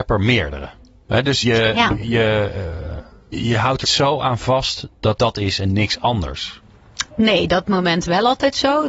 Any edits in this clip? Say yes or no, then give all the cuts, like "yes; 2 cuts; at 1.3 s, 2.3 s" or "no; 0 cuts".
yes; 6 cuts; at 1.4 s, 3.3 s, 3.8 s, 5.2 s, 7.1 s, 7.6 s